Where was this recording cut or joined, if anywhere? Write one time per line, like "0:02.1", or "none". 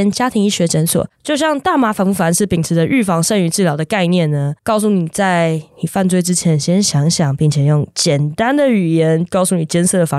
0:04.6